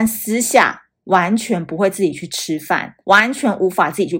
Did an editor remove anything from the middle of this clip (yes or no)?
yes